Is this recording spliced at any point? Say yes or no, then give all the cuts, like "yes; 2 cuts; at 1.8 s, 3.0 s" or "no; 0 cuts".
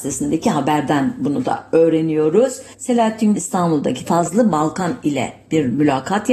yes; 2 cuts; at 3.4 s, 4.1 s